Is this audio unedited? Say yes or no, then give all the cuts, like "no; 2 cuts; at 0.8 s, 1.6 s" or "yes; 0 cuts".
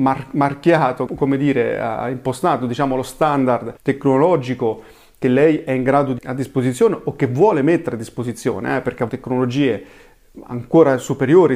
no; 4 cuts; at 1.1 s, 3.8 s, 6.2 s, 9.1 s